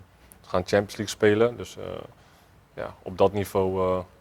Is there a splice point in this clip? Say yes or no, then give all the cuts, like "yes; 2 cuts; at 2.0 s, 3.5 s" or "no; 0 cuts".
no; 0 cuts